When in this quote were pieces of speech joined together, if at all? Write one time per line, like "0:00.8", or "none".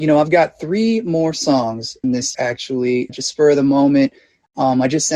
0:02.0
0:02.3
0:03.1